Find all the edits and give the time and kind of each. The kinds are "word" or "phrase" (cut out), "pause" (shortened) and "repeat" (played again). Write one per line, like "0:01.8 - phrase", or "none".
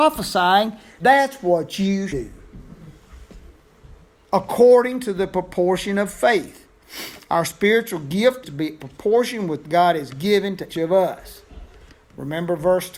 0:01.0 - word
0:02.1 - word
0:04.1 - pause
0:08.4 - word
0:08.8 - phrase
0:09.6 - phrase
0:10.7 - word